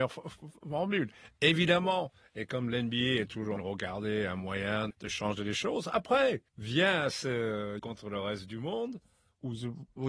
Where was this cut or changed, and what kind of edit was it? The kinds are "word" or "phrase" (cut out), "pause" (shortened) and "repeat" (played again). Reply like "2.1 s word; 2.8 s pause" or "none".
3.6 s phrase; 4.9 s word; 6.5 s pause; 7.8 s word